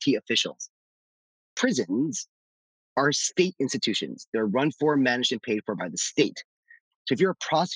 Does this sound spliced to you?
no; 0 cuts

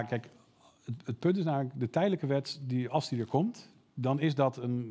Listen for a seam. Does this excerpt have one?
no; 0 cuts

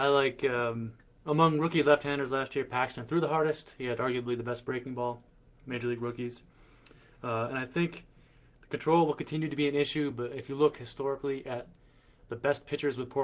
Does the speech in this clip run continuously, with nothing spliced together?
yes; 0 cuts

